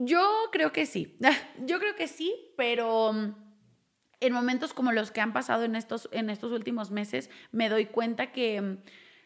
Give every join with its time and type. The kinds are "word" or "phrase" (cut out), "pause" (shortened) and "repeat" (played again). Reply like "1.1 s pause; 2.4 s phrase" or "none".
none